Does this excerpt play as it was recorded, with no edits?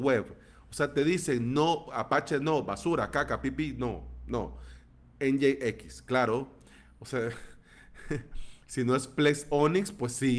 yes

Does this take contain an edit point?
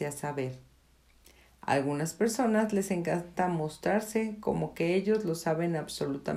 no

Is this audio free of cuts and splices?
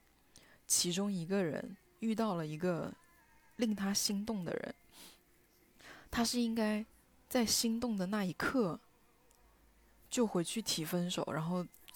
yes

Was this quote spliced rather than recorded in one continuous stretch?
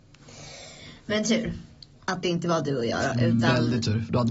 no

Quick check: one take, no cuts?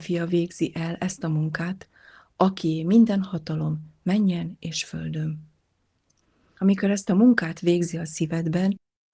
yes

